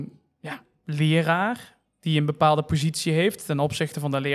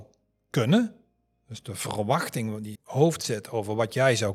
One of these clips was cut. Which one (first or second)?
second